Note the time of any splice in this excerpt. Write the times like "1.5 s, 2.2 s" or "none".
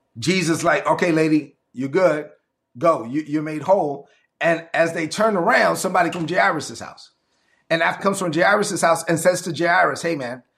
6.1 s, 8.0 s